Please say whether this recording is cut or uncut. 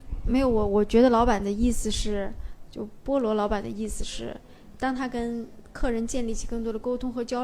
uncut